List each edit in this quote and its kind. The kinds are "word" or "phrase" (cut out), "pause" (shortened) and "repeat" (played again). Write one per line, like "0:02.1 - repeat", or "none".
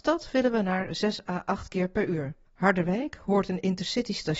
0:02.5 - pause